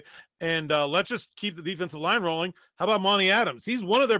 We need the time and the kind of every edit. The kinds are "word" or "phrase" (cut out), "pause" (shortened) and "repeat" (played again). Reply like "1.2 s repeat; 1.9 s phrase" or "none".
none